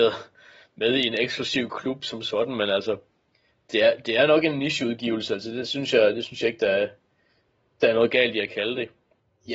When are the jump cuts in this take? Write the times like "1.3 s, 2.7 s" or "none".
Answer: none